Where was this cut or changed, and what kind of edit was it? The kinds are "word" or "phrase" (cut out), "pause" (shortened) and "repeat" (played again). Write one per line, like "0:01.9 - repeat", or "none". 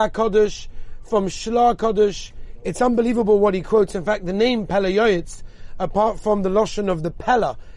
none